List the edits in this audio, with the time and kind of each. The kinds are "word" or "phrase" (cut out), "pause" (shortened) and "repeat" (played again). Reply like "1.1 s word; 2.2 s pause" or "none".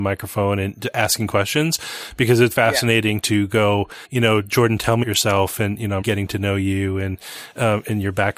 2.5 s word; 4.0 s pause; 5.0 s word; 6.0 s word